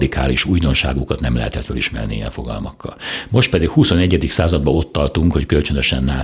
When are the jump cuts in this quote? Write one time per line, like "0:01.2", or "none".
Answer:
none